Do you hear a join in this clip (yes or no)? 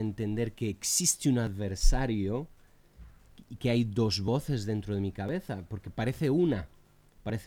no